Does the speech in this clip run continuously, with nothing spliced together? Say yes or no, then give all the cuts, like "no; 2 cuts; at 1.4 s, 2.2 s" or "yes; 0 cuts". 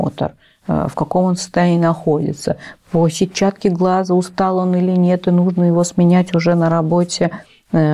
yes; 0 cuts